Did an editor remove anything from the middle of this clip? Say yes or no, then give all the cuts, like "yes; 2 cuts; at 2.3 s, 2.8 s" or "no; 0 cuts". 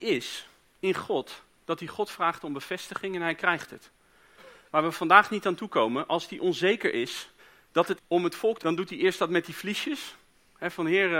yes; 3 cuts; at 7.4 s, 8.0 s, 8.6 s